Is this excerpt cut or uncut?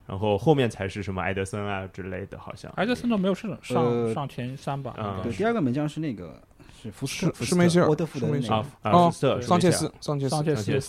cut